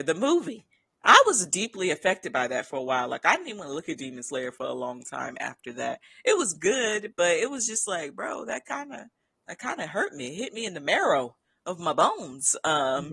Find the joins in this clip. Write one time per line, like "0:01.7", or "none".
none